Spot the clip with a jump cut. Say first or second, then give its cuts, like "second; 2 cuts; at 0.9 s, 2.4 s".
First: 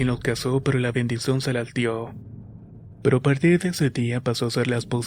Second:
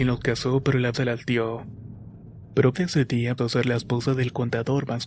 second; 3 cuts; at 0.9 s, 2.7 s, 3.4 s